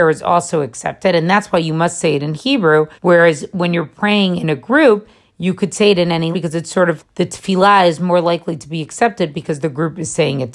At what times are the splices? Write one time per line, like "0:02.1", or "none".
0:03.0
0:06.3
0:07.0